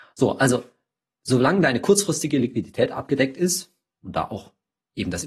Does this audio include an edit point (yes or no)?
no